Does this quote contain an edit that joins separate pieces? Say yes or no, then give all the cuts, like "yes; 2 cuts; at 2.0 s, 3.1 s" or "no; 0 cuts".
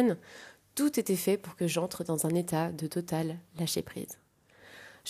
no; 0 cuts